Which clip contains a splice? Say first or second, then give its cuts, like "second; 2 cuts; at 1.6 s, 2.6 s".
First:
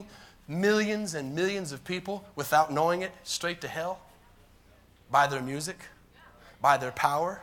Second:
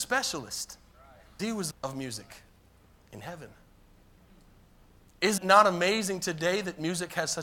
second; 3 cuts; at 1.4 s, 1.7 s, 5.4 s